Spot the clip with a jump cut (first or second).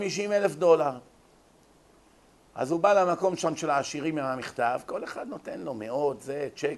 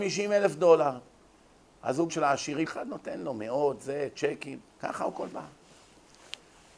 second